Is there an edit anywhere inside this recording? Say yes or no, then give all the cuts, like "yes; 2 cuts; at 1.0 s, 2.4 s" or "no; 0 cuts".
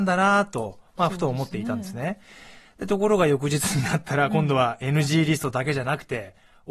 no; 0 cuts